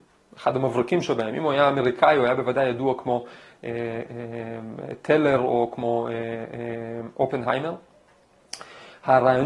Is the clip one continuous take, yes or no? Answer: yes